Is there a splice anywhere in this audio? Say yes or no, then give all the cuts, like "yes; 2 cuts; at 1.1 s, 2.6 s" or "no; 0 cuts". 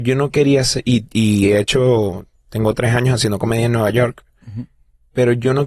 no; 0 cuts